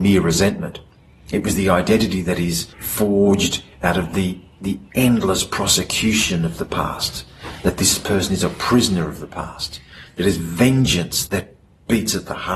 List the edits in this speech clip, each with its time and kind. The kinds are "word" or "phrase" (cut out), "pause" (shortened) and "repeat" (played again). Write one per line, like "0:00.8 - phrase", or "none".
0:02.7 - pause
0:11.3 - word